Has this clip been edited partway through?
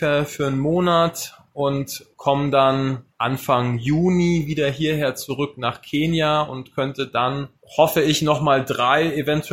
no; 0 cuts

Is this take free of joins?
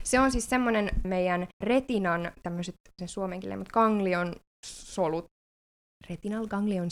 no; 3 cuts; at 1.0 s, 1.6 s, 3.0 s

